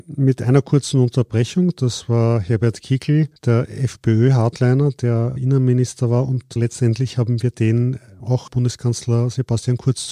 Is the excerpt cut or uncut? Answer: cut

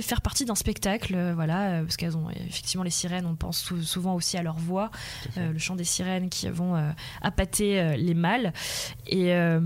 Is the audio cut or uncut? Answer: uncut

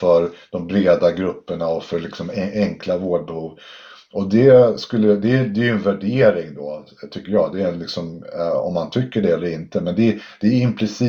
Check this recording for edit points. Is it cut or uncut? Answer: uncut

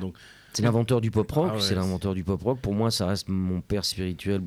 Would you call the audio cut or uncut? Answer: uncut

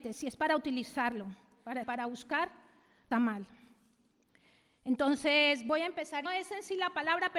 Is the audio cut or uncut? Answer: cut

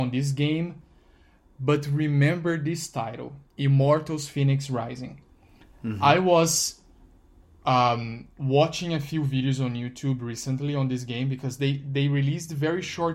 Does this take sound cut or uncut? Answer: uncut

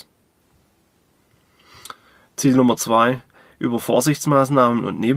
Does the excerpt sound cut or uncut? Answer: uncut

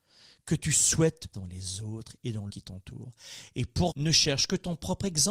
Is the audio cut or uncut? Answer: cut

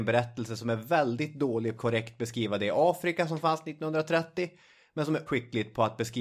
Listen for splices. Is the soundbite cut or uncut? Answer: cut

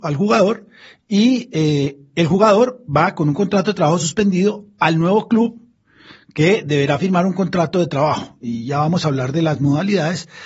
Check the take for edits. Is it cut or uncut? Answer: uncut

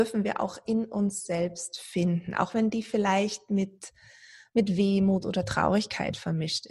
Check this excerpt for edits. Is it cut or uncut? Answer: uncut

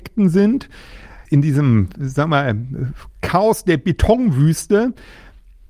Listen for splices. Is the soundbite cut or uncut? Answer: cut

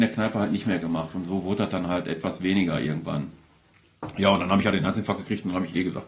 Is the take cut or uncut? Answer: uncut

